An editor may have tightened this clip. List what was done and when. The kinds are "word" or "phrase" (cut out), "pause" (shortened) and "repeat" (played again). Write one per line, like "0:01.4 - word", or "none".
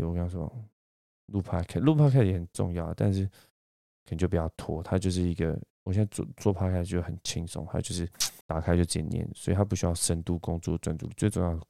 0:08.4 - pause